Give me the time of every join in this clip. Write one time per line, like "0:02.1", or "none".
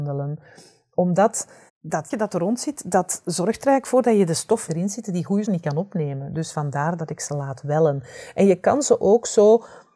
0:01.7
0:02.1
0:04.7
0:05.4